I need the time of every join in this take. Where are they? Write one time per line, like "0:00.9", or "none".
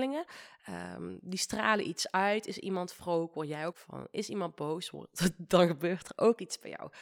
0:03.7